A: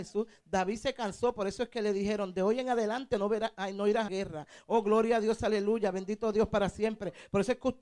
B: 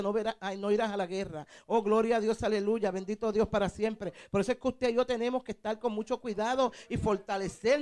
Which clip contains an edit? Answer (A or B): A